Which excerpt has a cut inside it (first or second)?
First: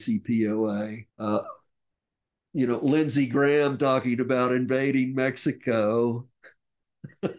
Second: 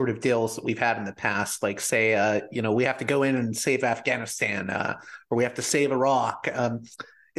first